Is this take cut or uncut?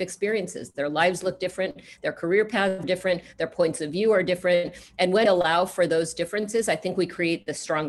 cut